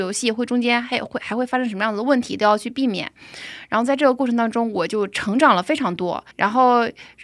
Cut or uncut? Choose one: cut